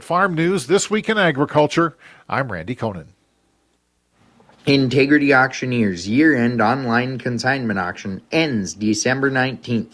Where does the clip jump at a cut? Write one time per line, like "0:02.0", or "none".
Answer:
none